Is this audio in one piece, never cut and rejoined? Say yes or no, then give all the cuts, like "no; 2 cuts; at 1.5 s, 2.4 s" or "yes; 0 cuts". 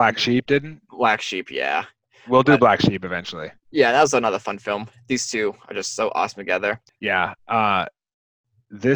yes; 0 cuts